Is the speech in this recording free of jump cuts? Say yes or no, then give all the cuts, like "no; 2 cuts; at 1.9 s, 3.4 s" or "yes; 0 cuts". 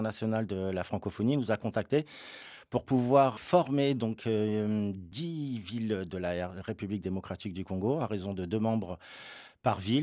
yes; 0 cuts